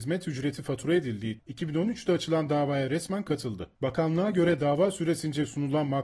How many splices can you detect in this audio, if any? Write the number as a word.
two